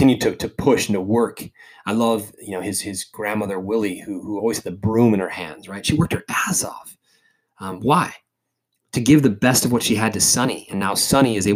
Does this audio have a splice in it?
no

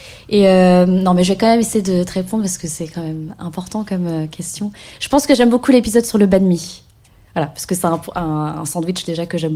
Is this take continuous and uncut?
yes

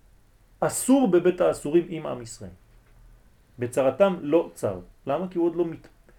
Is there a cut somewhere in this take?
no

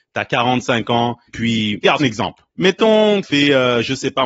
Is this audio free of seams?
no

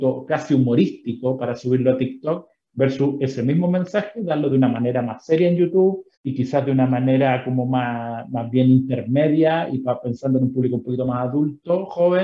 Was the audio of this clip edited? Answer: yes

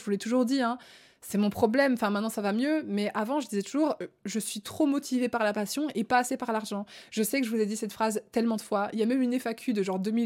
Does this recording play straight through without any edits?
yes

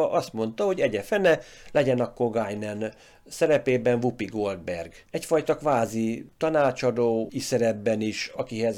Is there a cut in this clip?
yes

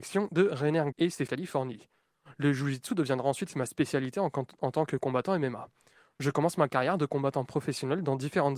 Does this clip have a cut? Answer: yes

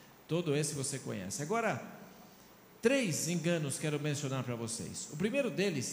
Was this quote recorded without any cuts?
yes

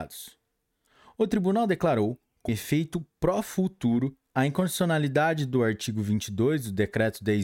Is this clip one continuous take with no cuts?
no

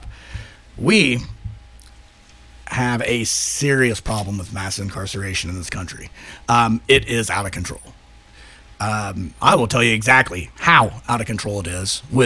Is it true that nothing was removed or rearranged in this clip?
yes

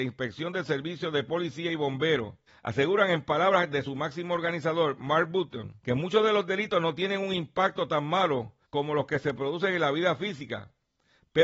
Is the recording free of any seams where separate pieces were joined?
no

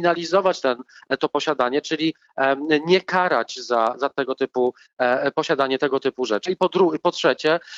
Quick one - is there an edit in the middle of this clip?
no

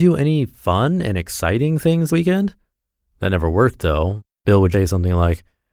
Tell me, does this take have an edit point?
yes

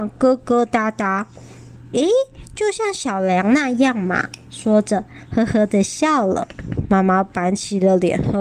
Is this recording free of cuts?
yes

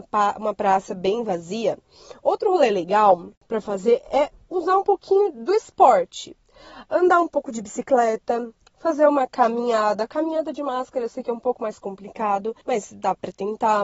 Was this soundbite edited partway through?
yes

